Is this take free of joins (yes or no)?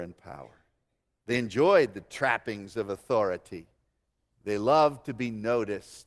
no